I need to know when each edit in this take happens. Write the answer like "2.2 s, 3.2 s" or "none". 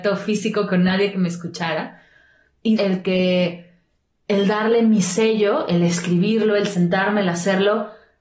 2.8 s